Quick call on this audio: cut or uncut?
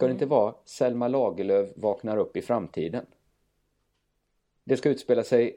uncut